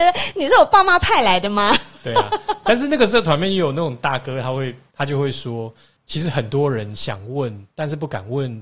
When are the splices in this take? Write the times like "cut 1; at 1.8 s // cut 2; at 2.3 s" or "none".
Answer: cut 1; at 7.7 s